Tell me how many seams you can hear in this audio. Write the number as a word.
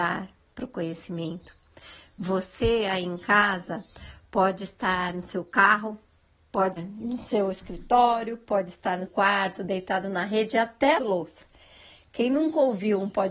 three